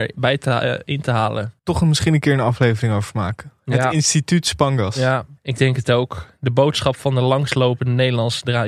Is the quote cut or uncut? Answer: cut